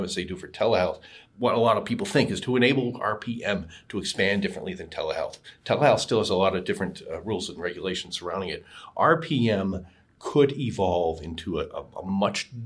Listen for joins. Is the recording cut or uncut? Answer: uncut